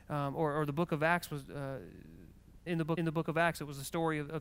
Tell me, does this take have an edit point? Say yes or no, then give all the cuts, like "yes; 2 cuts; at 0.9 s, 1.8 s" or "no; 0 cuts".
yes; 2 cuts; at 2.7 s, 3.0 s